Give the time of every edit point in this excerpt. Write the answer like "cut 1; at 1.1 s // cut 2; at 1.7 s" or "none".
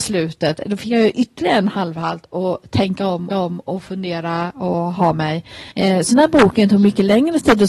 cut 1; at 3.3 s // cut 2; at 5.7 s // cut 3; at 6.1 s